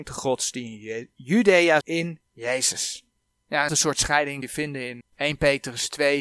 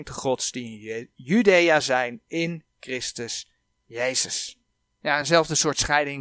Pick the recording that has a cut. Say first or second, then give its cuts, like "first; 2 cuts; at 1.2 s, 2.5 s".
first; 5 cuts; at 1.8 s, 2.3 s, 3.7 s, 4.4 s, 5.0 s